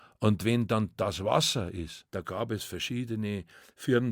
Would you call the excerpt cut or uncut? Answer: cut